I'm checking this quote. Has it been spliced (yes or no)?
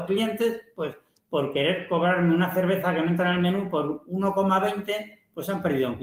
no